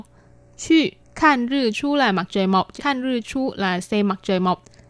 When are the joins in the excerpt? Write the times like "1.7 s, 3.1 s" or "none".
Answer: 1.0 s, 1.7 s, 2.8 s